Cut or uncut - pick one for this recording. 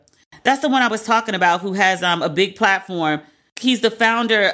uncut